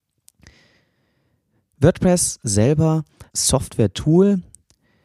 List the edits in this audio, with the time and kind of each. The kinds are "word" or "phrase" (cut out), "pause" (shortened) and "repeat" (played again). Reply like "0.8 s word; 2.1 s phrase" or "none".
3.3 s word